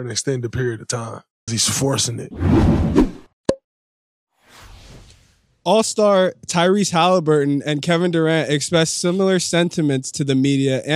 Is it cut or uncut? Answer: cut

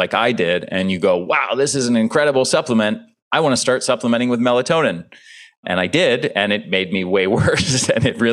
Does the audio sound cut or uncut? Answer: uncut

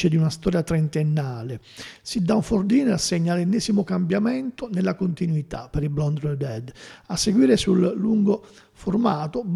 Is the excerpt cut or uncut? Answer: uncut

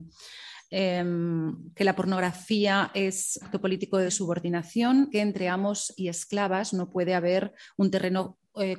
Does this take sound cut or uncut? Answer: cut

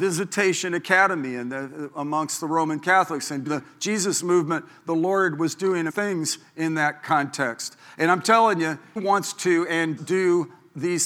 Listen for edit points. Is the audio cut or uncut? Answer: cut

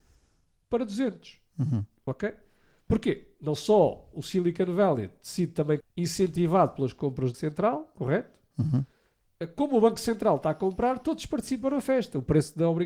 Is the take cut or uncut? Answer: cut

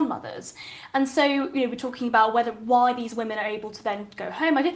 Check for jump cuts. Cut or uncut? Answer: uncut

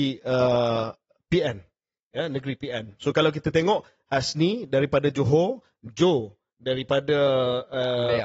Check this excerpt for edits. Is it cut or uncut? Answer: uncut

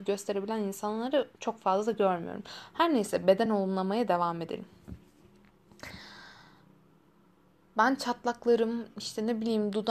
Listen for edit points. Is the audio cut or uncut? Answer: uncut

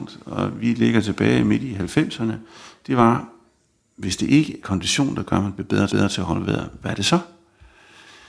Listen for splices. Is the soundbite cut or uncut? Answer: cut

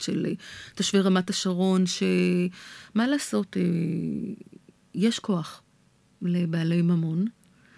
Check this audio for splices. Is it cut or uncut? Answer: uncut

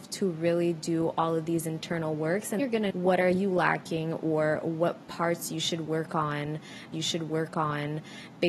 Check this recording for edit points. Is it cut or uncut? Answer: cut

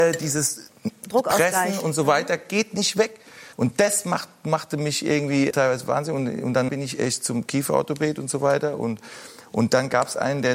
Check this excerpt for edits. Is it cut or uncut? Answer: cut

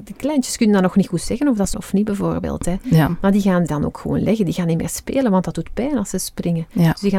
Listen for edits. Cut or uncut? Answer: cut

